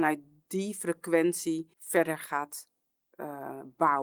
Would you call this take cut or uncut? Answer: cut